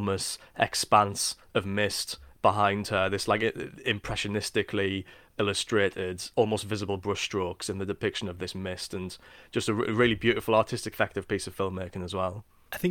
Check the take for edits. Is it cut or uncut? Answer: cut